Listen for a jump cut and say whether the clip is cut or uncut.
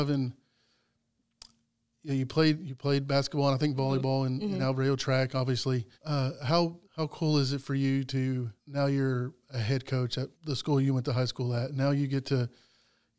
cut